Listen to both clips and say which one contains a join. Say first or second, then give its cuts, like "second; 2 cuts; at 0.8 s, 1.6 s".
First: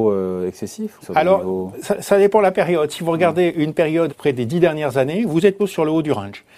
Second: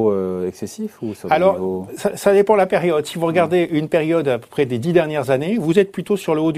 first; 3 cuts; at 1.0 s, 4.1 s, 5.6 s